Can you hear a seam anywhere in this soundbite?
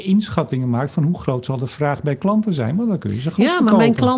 no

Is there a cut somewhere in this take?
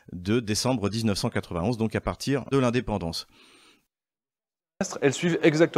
yes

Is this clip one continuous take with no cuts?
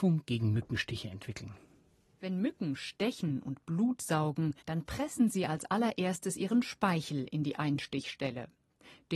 no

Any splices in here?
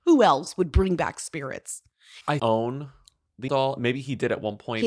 yes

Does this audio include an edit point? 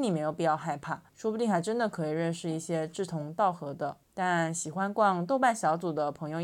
yes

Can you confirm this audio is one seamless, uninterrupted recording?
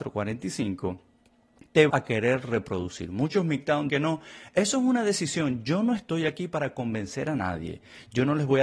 no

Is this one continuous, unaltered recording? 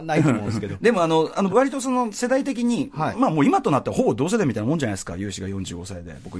no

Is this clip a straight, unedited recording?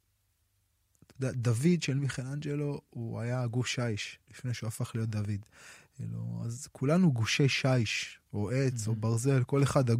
yes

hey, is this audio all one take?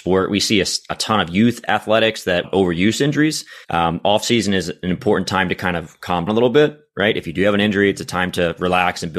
no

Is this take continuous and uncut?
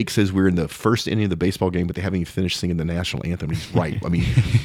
yes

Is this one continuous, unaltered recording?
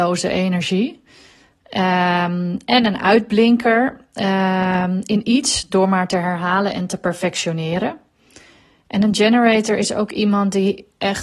yes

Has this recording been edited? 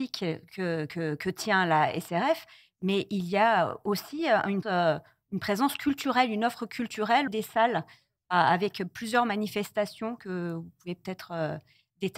yes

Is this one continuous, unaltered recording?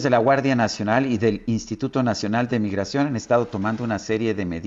yes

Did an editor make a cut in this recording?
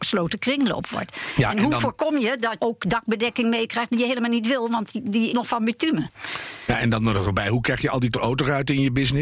yes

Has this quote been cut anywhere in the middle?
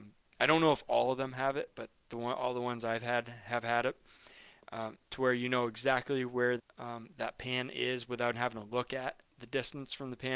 yes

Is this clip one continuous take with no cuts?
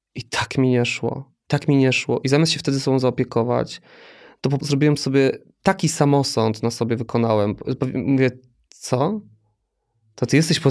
no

